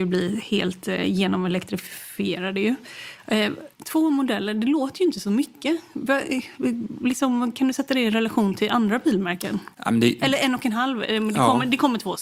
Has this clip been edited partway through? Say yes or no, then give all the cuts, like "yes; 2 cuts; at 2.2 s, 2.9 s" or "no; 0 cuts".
yes; 2 cuts; at 3.7 s, 9.7 s